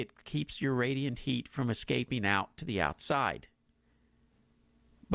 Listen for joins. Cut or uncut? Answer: uncut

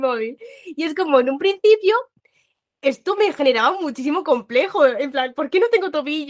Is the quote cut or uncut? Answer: uncut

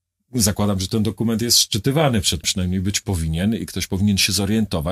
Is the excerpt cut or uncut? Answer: cut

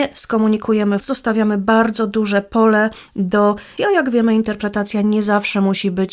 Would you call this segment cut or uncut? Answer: cut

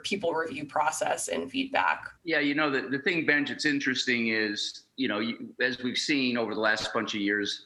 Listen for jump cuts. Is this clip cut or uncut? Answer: cut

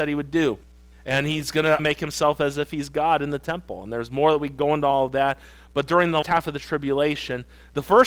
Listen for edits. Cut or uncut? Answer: cut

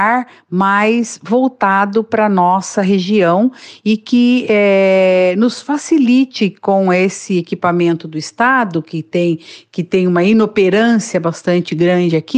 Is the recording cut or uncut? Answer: uncut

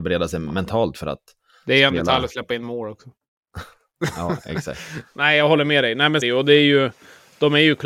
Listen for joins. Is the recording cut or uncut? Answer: cut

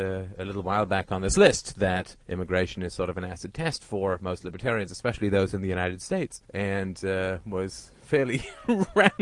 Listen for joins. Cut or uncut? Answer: cut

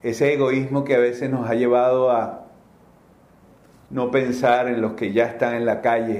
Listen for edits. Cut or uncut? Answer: uncut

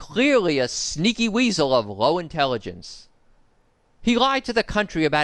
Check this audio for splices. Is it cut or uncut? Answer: uncut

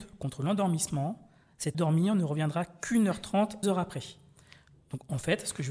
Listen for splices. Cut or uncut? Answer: cut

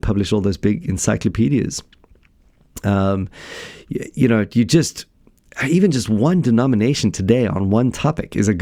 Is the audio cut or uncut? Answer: uncut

